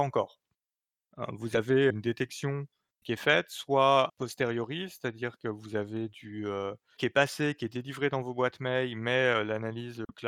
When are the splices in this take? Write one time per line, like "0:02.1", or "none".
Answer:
0:01.9
0:03.0
0:04.1
0:07.0

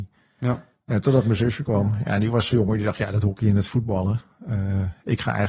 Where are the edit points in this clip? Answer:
0:02.5

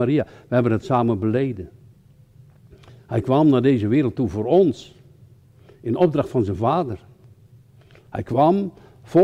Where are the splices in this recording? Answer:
none

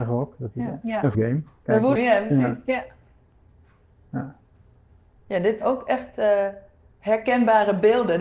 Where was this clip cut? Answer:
0:01.1
0:02.0
0:05.6

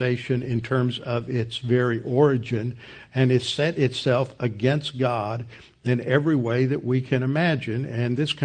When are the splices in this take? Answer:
none

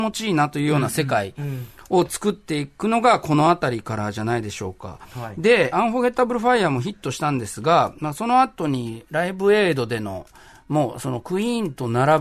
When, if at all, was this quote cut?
0:05.7

